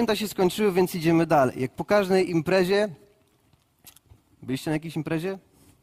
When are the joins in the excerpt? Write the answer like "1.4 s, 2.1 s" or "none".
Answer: none